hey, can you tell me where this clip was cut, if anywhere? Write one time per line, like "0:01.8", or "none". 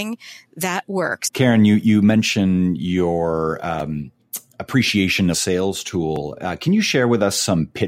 0:05.3